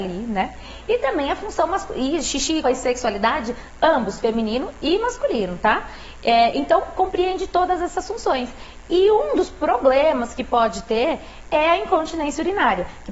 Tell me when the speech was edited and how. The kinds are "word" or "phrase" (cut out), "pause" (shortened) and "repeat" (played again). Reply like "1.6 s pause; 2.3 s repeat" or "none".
2.6 s word

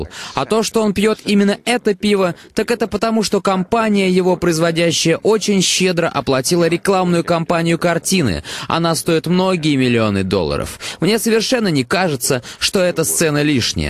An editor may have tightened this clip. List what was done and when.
none

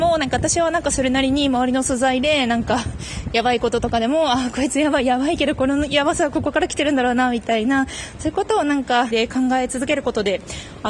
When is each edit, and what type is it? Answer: 9.1 s word

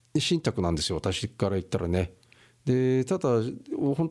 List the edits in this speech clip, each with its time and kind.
none

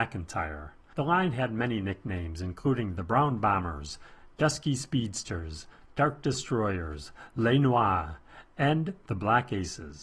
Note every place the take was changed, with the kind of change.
none

